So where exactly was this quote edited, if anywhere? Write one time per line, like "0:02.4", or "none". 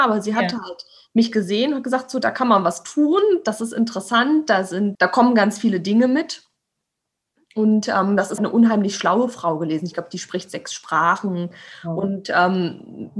0:04.9
0:08.4